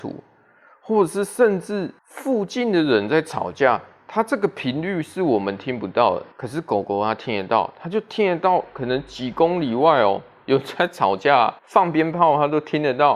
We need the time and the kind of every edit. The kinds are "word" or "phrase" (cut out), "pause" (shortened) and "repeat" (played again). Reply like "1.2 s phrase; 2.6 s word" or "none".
2.0 s pause; 6.3 s pause; 11.6 s pause